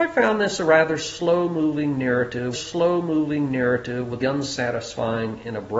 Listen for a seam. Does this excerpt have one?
yes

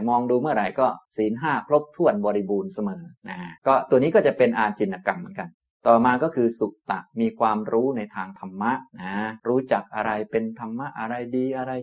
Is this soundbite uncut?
no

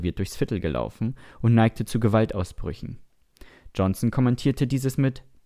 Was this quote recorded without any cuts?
yes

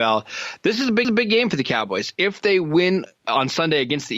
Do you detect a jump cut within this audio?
yes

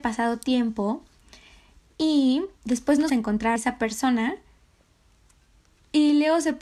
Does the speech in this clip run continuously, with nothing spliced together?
no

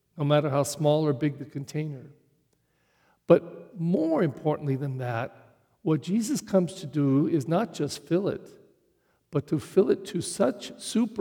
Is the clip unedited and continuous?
yes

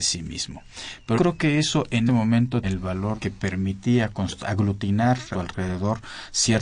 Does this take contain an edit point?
yes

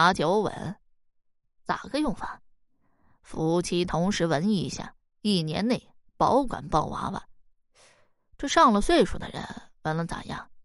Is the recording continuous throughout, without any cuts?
yes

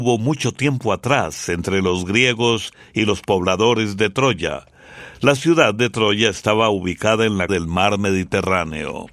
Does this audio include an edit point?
yes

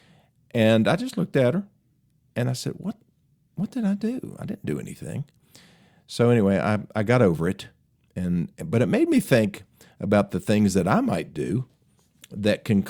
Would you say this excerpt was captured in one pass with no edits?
yes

